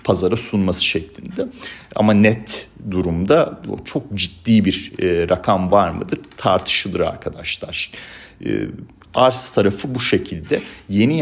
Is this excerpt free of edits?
yes; 0 cuts

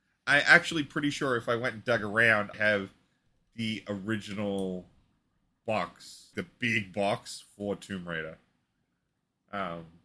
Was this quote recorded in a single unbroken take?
no; 2 cuts; at 2.5 s, 6.3 s

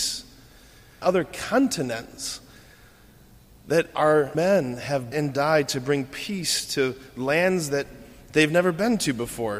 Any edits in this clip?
yes; 3 cuts; at 1.0 s, 4.3 s, 5.1 s

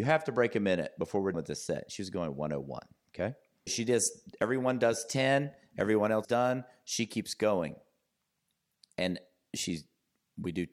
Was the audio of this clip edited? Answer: yes; 3 cuts; at 1.3 s, 3.7 s, 6.2 s

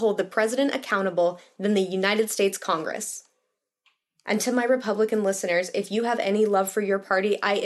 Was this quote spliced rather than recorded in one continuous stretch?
no; 0 cuts

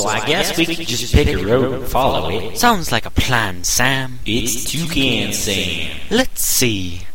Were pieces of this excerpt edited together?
no; 0 cuts

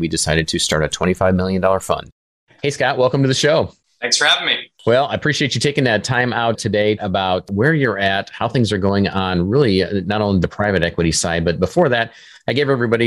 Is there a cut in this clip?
yes; 2 cuts; at 7.0 s, 10.4 s

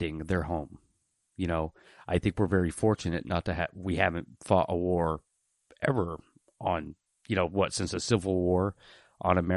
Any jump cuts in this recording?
no; 0 cuts

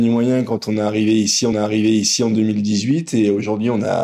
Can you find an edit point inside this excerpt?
yes; 1 cut; at 1.5 s

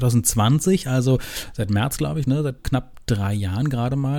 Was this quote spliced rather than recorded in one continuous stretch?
yes; 1 cut; at 2.6 s

